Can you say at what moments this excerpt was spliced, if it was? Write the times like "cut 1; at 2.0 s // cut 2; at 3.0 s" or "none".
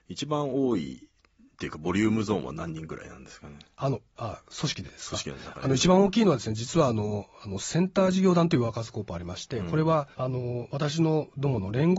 cut 1; at 10.1 s

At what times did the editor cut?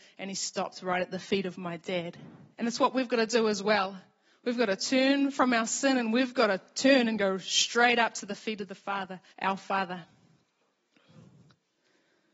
cut 1; at 2.5 s // cut 2; at 9.3 s

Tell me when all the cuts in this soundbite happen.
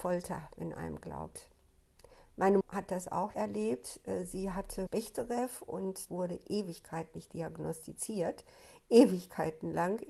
cut 1; at 1.0 s // cut 2; at 2.6 s // cut 3; at 3.3 s // cut 4; at 4.9 s // cut 5; at 6.1 s // cut 6; at 7.1 s

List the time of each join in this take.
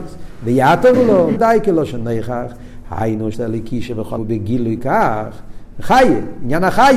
cut 1; at 0.9 s // cut 2; at 1.4 s // cut 3; at 3.3 s // cut 4; at 4.2 s // cut 5; at 4.8 s

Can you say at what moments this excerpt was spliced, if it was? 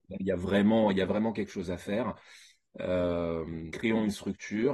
cut 1; at 3.7 s

